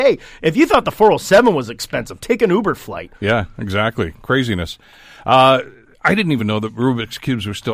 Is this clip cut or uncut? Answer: uncut